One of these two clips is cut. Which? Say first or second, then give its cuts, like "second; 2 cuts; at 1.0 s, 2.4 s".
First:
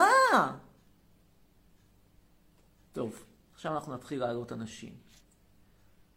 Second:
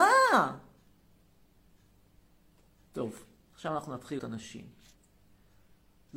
second; 1 cut; at 4.2 s